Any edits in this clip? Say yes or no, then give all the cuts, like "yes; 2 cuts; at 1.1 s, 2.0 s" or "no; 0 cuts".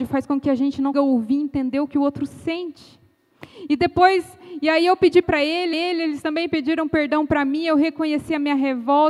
yes; 3 cuts; at 0.9 s, 5.2 s, 5.7 s